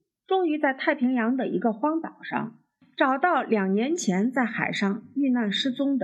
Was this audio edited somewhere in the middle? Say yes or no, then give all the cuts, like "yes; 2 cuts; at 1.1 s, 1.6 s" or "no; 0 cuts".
no; 0 cuts